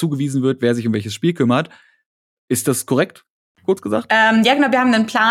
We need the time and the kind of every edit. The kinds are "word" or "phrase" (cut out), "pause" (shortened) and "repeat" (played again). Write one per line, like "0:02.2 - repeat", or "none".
none